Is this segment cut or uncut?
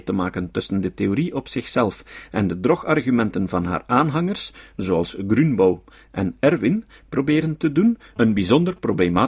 uncut